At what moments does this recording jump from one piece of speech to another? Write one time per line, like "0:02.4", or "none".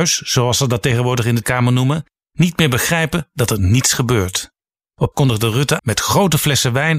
0:01.4
0:05.1
0:05.8